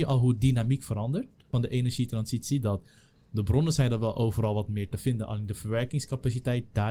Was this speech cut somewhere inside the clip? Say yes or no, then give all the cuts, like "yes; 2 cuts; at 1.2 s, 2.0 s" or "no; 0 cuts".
no; 0 cuts